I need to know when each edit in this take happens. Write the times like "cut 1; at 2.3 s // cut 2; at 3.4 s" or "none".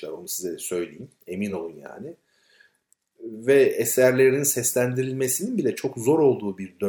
none